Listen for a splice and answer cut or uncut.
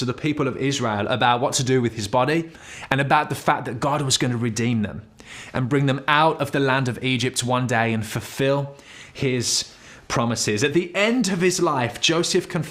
uncut